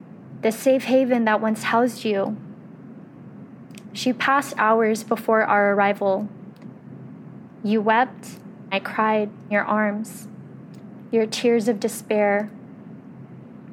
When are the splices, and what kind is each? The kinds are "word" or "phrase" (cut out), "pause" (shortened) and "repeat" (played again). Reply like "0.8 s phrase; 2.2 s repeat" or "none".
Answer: 8.7 s word; 9.5 s word

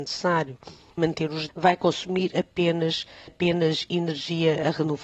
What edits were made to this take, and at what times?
1.0 s word; 1.5 s word; 3.3 s word

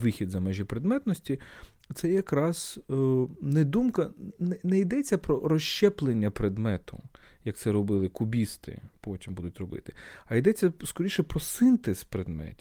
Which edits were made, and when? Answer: none

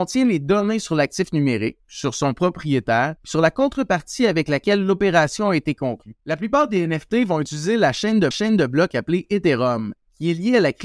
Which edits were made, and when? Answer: 3.2 s pause; 6.2 s pause; 8.3 s repeat

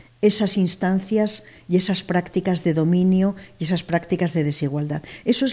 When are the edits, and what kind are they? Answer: none

